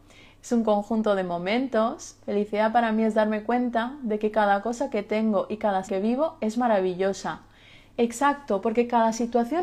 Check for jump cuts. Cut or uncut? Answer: cut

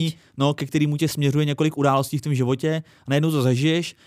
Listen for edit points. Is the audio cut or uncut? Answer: uncut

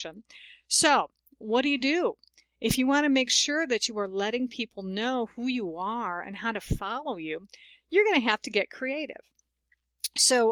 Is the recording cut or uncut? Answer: uncut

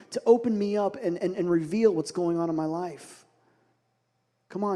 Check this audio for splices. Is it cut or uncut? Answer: uncut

